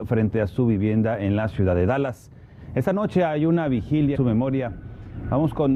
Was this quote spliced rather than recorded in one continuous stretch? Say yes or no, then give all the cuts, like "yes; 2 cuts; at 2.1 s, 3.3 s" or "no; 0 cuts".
yes; 1 cut; at 4.1 s